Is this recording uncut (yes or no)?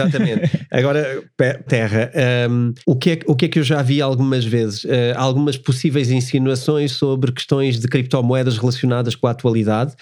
no